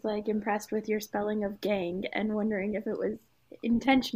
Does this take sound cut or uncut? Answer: uncut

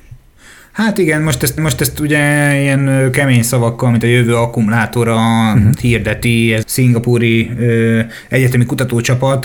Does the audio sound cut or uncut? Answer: cut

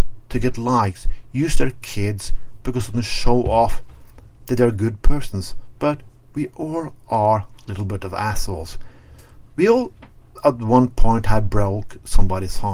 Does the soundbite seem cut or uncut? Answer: uncut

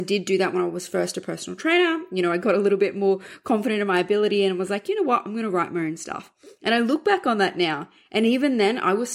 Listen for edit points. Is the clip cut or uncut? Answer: uncut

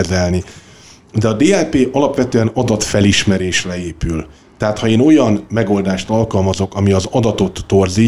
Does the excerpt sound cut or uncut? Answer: uncut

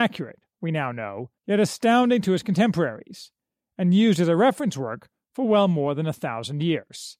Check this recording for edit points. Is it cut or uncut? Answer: cut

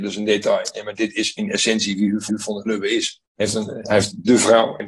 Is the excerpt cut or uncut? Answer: cut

